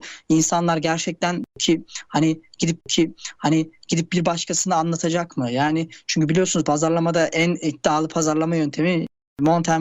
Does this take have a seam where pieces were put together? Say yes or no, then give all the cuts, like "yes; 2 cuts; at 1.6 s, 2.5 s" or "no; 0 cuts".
yes; 1 cut; at 2.8 s